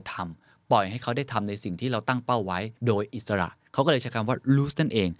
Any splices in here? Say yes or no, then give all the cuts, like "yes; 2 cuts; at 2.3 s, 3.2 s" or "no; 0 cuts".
yes; 1 cut; at 2.8 s